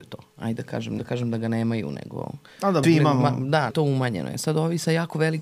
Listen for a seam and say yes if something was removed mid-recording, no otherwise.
yes